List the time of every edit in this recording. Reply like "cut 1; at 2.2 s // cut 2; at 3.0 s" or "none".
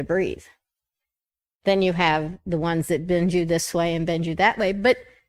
none